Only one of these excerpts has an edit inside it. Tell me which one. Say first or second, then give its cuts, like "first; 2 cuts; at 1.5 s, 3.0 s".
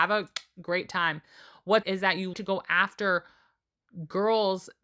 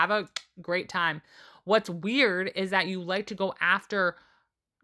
first; 2 cuts; at 1.8 s, 2.3 s